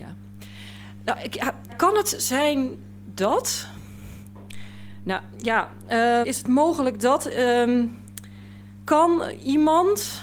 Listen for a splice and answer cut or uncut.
cut